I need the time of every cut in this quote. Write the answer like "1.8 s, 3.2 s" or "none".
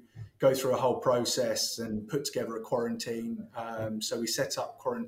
none